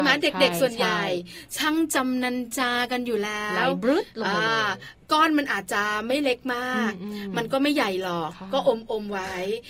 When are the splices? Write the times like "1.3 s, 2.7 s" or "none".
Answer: 5.0 s